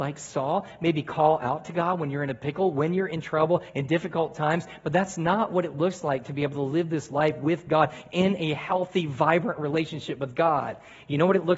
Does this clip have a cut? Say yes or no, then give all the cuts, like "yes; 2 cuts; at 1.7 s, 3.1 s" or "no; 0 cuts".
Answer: no; 0 cuts